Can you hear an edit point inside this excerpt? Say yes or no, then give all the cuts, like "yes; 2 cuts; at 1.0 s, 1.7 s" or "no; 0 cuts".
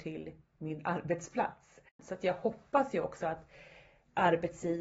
yes; 1 cut; at 1.9 s